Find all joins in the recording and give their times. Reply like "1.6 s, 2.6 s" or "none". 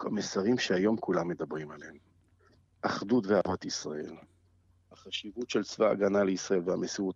none